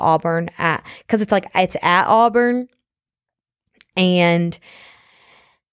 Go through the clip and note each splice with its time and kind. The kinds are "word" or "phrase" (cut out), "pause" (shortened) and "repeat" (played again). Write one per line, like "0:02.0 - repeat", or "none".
none